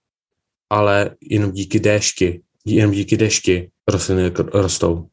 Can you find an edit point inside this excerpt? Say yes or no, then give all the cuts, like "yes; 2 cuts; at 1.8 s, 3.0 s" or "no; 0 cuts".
yes; 1 cut; at 3.8 s